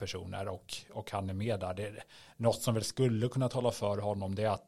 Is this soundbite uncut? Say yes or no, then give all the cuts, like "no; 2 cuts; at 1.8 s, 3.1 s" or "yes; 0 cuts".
yes; 0 cuts